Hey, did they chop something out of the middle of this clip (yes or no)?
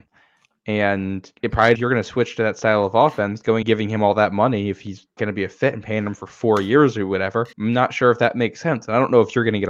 yes